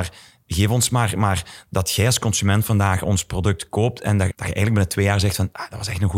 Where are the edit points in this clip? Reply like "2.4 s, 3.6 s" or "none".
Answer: 4.3 s

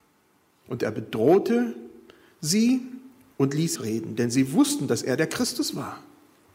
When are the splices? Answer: 3.7 s

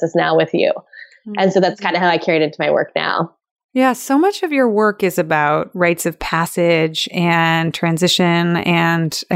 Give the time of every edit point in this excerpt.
none

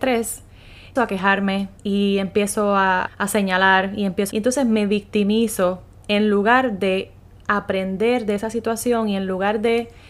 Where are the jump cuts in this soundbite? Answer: 1.0 s, 1.8 s, 3.1 s, 4.3 s

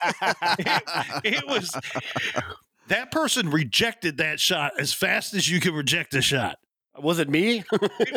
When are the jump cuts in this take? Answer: none

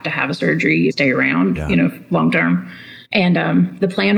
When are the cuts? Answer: 0.9 s, 3.0 s

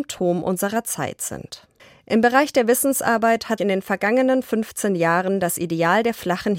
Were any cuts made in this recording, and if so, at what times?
1.8 s, 3.6 s

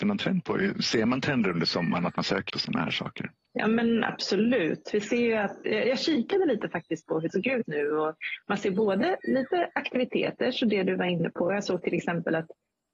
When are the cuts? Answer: 2.5 s, 5.7 s, 7.3 s, 7.7 s

